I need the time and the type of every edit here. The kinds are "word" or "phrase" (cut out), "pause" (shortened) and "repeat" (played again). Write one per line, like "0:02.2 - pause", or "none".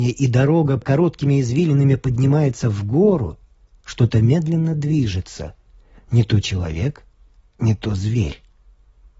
none